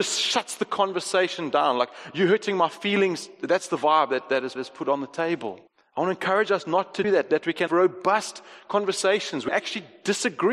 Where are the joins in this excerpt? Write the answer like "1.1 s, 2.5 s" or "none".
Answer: 4.6 s, 5.7 s, 7.0 s, 7.7 s, 9.5 s